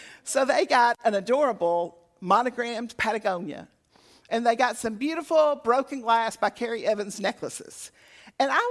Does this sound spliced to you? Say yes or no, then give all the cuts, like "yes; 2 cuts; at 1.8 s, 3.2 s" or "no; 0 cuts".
no; 0 cuts